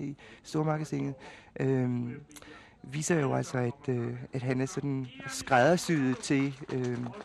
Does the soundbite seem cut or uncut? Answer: uncut